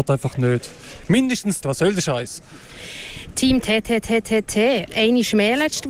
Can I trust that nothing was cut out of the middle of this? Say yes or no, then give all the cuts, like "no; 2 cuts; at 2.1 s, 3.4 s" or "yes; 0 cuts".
no; 2 cuts; at 1.6 s, 4.9 s